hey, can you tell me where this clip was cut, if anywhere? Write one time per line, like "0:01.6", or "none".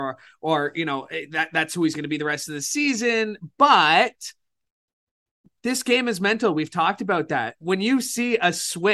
none